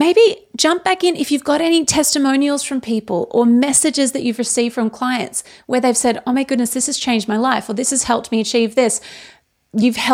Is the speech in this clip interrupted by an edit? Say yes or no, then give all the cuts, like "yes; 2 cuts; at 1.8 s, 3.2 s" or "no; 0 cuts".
no; 0 cuts